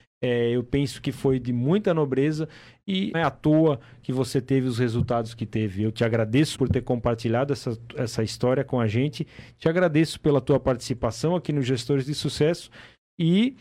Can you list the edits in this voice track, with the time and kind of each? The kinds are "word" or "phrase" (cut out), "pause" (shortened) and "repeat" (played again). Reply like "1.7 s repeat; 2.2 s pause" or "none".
3.1 s word; 6.5 s word